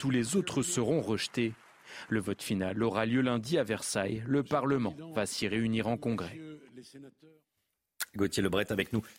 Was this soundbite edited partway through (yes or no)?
no